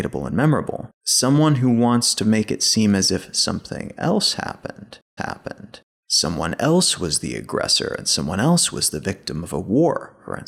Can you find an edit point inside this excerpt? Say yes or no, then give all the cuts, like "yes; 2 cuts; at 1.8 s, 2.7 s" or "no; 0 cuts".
yes; 2 cuts; at 0.9 s, 5.2 s